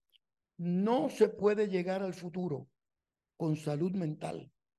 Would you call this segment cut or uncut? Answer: uncut